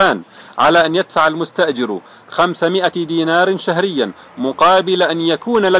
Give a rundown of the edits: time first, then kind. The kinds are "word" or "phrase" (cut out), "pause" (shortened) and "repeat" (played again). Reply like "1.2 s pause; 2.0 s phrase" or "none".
none